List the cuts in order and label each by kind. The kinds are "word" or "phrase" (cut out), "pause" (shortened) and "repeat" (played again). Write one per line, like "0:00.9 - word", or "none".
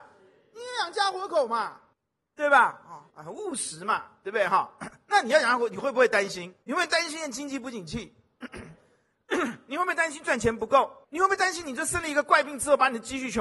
0:01.9 - pause
0:03.1 - pause
0:06.6 - pause
0:11.0 - pause